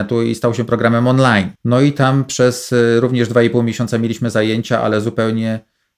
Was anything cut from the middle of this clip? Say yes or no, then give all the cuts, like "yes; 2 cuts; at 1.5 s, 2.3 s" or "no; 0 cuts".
yes; 1 cut; at 1.6 s